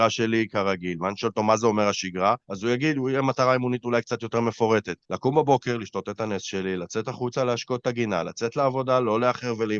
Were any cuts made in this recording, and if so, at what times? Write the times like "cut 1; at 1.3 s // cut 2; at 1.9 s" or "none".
cut 1; at 2.4 s // cut 2; at 5.0 s